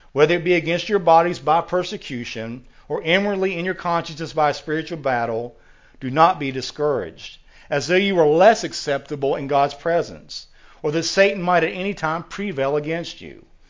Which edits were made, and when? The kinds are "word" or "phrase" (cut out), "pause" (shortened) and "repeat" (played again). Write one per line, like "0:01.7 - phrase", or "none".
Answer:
none